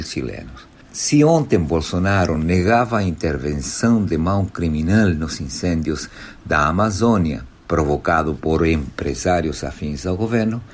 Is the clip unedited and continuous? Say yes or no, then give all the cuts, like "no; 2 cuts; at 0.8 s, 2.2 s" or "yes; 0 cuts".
yes; 0 cuts